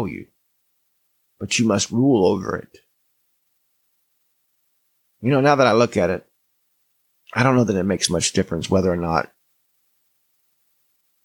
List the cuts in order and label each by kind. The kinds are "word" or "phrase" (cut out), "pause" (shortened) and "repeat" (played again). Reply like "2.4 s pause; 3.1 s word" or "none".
none